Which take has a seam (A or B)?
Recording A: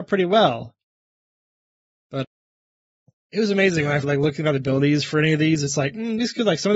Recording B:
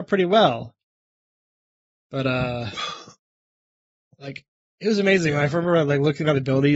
A